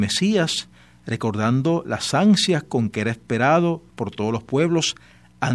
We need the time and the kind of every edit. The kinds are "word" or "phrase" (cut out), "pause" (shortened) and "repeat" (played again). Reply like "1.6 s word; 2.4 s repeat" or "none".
none